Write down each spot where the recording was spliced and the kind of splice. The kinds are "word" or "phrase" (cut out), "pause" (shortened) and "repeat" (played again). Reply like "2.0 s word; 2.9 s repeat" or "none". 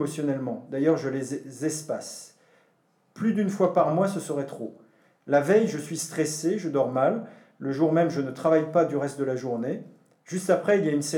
none